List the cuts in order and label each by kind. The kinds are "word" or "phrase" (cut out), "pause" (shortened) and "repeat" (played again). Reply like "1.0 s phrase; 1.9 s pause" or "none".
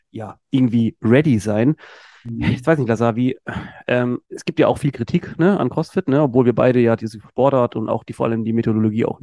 4.2 s pause